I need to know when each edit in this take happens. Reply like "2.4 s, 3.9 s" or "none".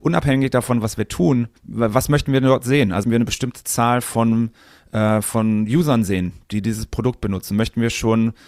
1.6 s, 3.0 s